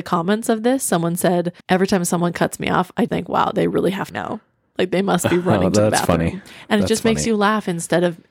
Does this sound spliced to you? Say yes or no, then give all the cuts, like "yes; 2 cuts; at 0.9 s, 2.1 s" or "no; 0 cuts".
yes; 3 cuts; at 1.6 s, 3.1 s, 4.1 s